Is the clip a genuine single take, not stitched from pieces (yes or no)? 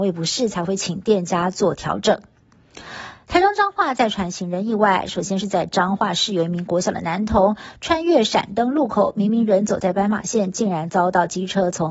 yes